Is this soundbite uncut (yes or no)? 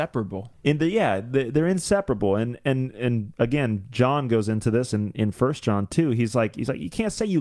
yes